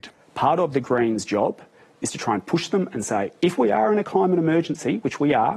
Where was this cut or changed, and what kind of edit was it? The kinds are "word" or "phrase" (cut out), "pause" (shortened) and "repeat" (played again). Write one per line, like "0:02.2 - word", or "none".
none